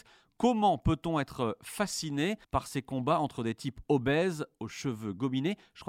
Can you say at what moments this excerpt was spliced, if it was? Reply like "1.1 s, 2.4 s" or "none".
2.4 s